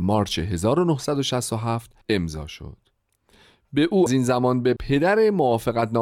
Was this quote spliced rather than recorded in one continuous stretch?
yes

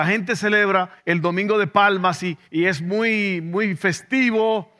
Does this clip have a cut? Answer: yes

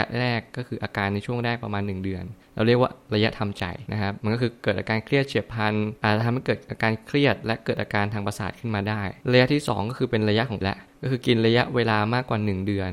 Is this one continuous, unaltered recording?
no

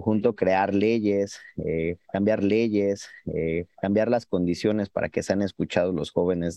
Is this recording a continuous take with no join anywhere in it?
no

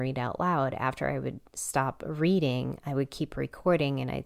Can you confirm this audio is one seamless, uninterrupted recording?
yes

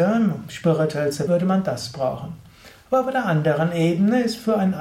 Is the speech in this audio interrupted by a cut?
yes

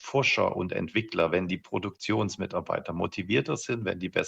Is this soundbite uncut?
yes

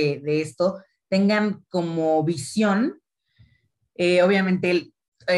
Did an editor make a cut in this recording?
no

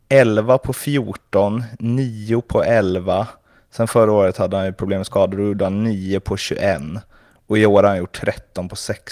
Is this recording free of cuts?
yes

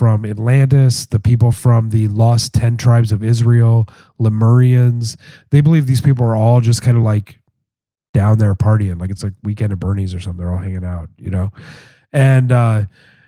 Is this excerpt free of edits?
yes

